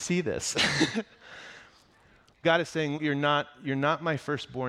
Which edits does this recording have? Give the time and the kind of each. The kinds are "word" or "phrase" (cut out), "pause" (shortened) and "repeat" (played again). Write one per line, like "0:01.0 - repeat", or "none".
0:02.4 - word
0:02.9 - word